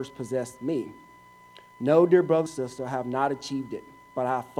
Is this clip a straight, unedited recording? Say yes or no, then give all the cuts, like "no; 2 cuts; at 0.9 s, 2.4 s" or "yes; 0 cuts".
no; 1 cut; at 2.5 s